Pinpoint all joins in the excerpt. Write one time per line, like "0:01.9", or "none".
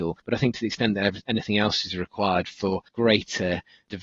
0:02.9